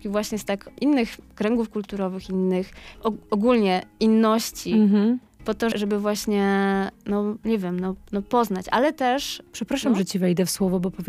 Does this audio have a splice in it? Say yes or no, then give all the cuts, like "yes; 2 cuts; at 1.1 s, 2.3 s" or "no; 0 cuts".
yes; 1 cut; at 5.7 s